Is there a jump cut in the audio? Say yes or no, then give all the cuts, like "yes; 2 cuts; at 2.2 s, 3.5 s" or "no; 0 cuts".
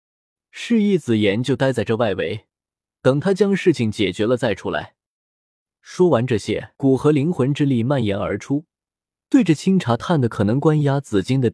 yes; 1 cut; at 6.7 s